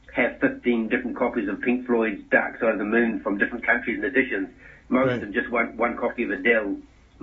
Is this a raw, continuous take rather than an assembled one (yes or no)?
yes